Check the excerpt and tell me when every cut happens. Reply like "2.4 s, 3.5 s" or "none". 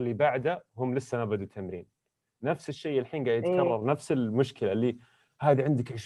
none

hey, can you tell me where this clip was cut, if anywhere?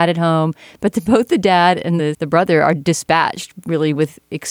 none

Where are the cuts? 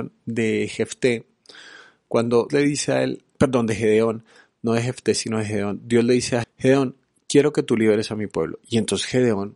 2.5 s, 3.3 s, 6.4 s

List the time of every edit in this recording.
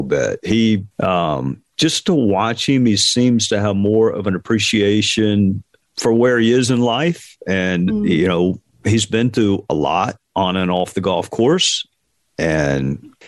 0.9 s

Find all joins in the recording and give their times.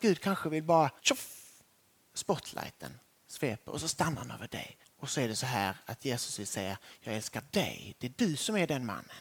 1.0 s, 4.8 s

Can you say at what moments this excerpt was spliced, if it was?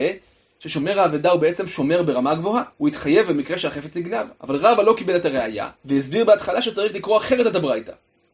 2.7 s, 4.4 s, 5.8 s

